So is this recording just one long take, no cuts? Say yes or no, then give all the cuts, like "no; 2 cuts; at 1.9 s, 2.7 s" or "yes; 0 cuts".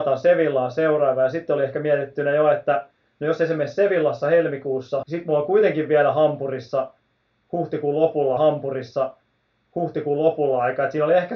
no; 2 cuts; at 5.0 s, 8.4 s